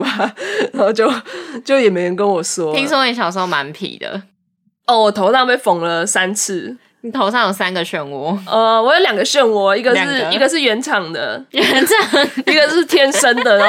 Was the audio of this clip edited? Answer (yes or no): no